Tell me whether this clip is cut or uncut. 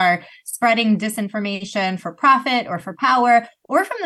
uncut